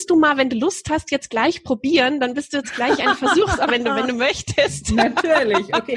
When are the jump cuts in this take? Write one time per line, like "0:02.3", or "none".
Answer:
0:03.7

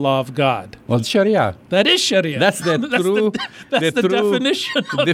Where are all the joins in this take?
0:01.0
0:02.6

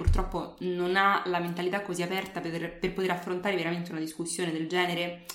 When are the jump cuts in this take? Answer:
none

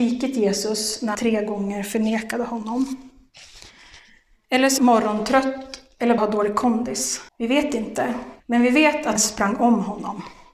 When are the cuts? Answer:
0:01.1
0:04.8
0:06.2
0:07.3
0:08.4
0:09.2

